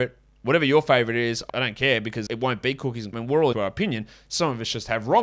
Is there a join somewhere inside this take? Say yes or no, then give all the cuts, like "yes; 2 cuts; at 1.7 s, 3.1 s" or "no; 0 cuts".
yes; 4 cuts; at 1.5 s, 2.3 s, 3.1 s, 3.5 s